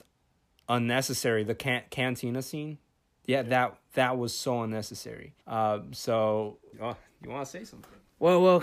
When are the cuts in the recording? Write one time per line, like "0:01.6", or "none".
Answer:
0:02.9
0:05.4
0:06.7